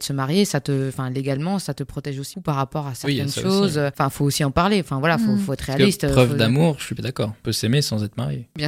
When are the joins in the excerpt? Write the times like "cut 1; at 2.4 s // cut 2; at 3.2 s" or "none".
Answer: cut 1; at 2.3 s // cut 2; at 7.0 s // cut 3; at 7.4 s